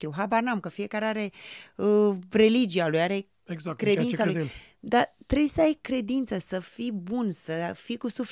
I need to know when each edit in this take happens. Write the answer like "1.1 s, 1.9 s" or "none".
none

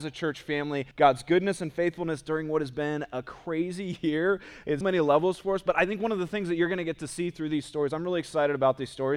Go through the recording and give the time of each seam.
0.9 s, 4.8 s

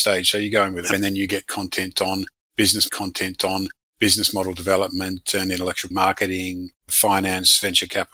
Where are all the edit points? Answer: 0.9 s, 2.9 s, 5.9 s, 6.8 s

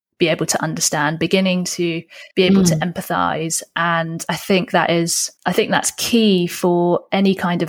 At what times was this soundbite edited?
2.3 s, 5.4 s

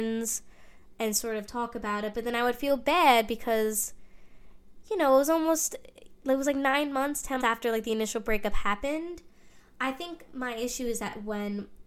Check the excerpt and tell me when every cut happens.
7.4 s

